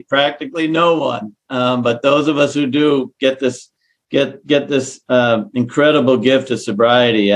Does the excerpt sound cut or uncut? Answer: uncut